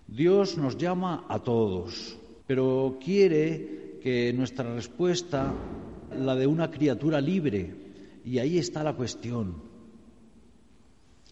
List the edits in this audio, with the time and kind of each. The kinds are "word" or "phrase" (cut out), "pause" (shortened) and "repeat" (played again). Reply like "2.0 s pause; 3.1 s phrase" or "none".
2.4 s pause; 6.1 s word